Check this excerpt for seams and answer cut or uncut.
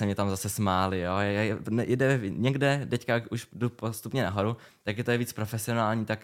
uncut